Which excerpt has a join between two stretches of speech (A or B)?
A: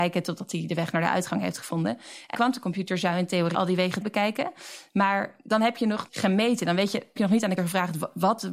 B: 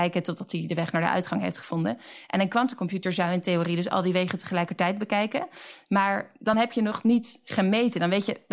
A